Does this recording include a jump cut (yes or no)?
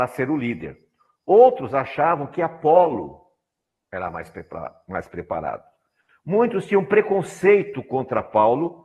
no